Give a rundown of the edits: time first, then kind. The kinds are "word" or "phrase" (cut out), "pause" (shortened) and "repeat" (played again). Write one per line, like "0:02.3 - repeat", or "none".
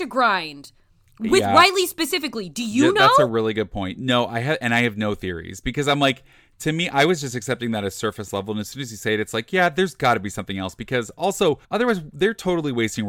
0:11.6 - pause